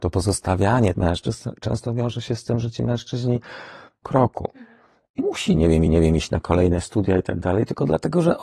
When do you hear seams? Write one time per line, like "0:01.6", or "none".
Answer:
0:00.9
0:04.0
0:05.2
0:05.9